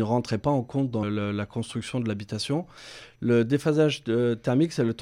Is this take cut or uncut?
cut